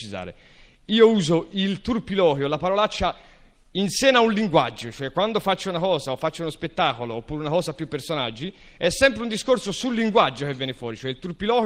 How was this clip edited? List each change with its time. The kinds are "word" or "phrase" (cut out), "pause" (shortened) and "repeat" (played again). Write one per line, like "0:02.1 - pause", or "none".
none